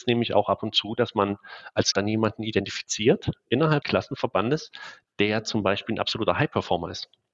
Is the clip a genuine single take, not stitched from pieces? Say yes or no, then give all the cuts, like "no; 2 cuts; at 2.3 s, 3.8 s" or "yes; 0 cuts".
no; 2 cuts; at 1.9 s, 3.8 s